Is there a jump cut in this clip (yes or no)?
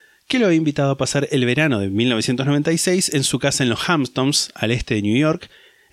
no